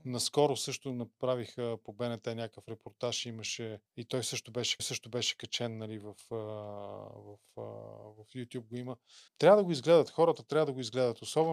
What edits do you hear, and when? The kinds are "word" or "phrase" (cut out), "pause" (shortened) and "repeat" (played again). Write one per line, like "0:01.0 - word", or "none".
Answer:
0:03.9 - pause
0:04.8 - repeat
0:09.3 - pause